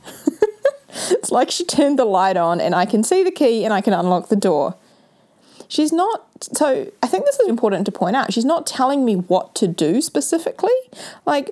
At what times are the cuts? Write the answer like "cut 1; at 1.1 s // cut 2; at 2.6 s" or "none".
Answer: cut 1; at 7.5 s